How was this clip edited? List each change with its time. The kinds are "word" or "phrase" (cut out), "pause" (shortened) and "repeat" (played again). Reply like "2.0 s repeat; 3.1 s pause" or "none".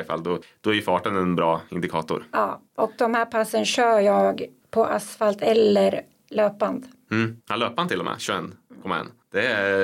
2.7 s pause; 7.4 s pause